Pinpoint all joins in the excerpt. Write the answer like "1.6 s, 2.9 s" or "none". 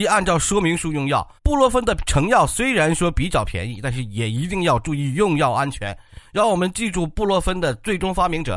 1.4 s